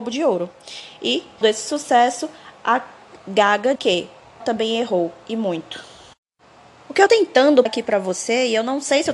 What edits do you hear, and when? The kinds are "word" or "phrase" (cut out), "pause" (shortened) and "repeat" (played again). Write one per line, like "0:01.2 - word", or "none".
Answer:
0:01.4 - word
0:03.7 - word
0:04.4 - word
0:07.1 - word
0:07.7 - word